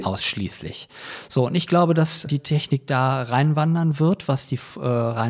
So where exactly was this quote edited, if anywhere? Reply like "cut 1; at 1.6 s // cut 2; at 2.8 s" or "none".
cut 1; at 2.3 s